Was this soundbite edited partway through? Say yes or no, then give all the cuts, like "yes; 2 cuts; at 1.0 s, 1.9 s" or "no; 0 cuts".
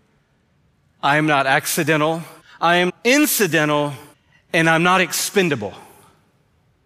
yes; 3 cuts; at 2.4 s, 2.9 s, 4.1 s